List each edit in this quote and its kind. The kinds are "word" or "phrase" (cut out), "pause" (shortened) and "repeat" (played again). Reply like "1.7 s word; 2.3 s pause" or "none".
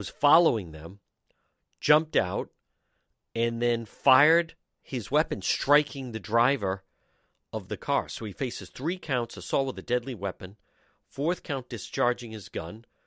none